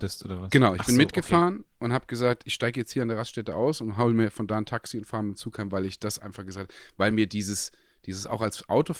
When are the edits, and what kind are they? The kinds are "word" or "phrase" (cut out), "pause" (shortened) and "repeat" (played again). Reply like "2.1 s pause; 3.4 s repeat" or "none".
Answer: none

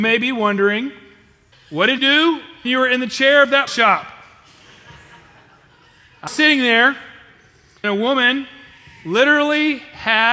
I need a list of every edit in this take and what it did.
1.5 s word; 2.0 s word; 2.6 s word; 3.7 s word; 6.3 s word; 7.8 s word

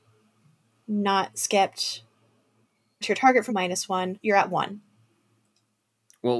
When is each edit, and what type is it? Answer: 3.0 s word; 3.5 s word; 4.2 s word

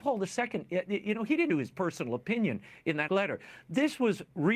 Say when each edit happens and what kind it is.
1.5 s word; 3.1 s word

